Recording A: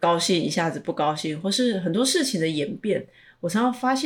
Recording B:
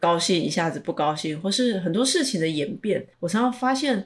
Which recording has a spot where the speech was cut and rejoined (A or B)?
B